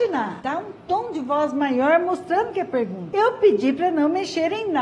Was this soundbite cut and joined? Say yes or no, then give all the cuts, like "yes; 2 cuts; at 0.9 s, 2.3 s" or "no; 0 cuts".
no; 0 cuts